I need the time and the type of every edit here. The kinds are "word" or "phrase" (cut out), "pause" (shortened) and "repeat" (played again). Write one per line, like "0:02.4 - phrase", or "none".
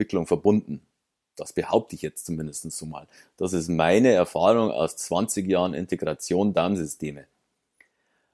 none